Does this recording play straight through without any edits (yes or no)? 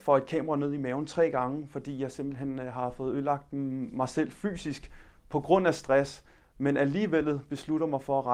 yes